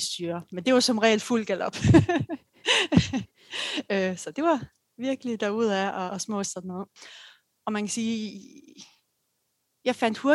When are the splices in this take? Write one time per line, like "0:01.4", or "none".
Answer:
0:06.1
0:06.5